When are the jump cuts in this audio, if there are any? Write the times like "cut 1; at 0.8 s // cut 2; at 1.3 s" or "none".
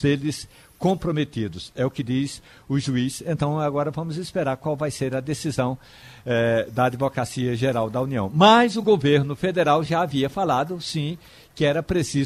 none